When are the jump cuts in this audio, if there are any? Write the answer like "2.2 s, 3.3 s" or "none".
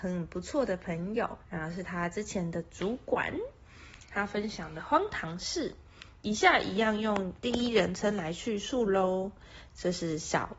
1.4 s